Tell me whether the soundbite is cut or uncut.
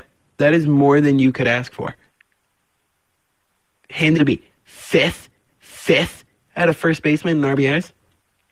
cut